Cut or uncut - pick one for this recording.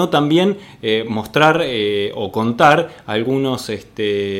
uncut